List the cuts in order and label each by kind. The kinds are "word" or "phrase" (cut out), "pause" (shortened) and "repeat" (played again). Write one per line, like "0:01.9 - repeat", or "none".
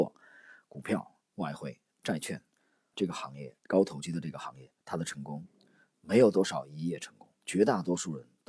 0:02.9 - word
0:03.6 - pause
0:04.8 - pause
0:07.4 - pause